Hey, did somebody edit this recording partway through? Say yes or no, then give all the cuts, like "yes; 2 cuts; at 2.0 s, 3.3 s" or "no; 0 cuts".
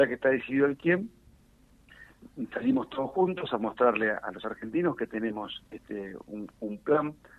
no; 0 cuts